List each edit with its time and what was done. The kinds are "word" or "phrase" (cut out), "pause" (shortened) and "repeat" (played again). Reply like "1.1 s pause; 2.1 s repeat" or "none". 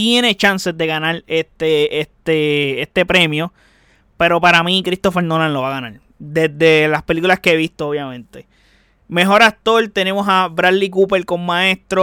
none